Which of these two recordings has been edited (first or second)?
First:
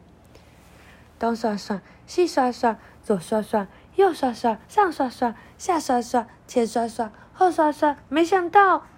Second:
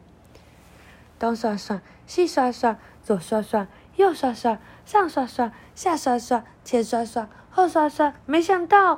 first